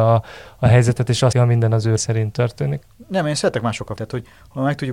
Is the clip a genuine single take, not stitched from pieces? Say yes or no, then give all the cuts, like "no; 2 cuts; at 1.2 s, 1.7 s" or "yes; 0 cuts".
no; 3 cuts; at 1.3 s, 2.0 s, 4.0 s